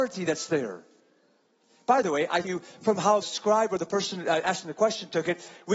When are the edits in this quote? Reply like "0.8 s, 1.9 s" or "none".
2.4 s, 3.2 s